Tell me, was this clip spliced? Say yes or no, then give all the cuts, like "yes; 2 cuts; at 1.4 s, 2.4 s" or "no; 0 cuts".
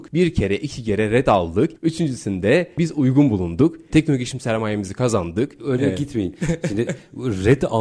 no; 0 cuts